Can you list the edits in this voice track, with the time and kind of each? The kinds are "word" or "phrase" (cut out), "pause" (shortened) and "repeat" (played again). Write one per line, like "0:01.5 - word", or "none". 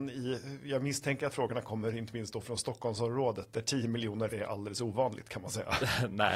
0:01.3 - phrase
0:03.5 - word
0:04.3 - phrase